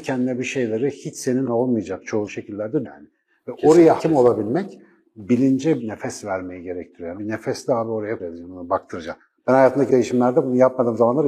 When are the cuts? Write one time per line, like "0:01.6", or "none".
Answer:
0:01.5
0:02.3
0:02.8
0:04.0
0:05.8
0:07.2
0:08.2
0:09.9